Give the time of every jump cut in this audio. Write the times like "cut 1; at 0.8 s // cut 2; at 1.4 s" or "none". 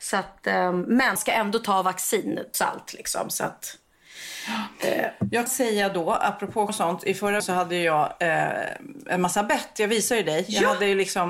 cut 1; at 1.2 s // cut 2; at 2.5 s // cut 3; at 5.5 s // cut 4; at 6.7 s // cut 5; at 7.4 s